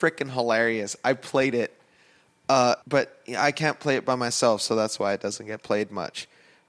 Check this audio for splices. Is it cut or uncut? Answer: cut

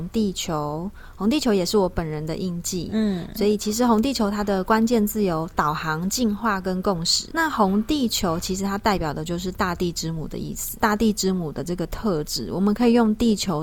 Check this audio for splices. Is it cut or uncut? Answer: uncut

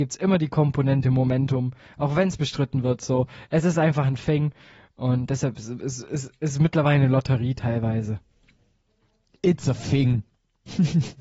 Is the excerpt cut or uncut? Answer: uncut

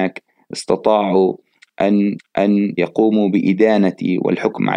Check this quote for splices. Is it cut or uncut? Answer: cut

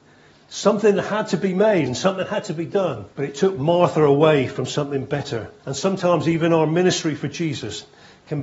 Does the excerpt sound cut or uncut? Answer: cut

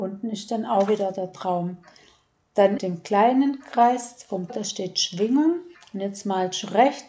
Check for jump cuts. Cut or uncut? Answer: cut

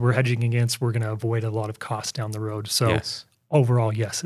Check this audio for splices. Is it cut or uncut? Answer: uncut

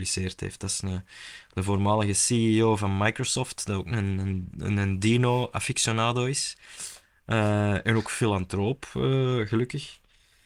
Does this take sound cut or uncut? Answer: uncut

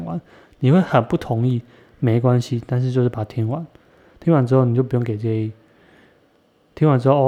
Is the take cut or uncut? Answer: uncut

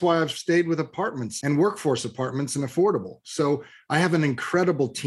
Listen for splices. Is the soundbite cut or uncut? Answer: uncut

